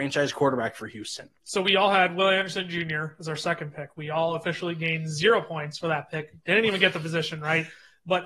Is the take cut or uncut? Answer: cut